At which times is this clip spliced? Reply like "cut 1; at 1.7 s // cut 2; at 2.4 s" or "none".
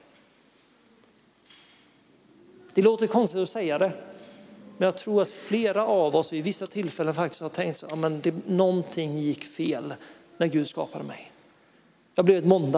none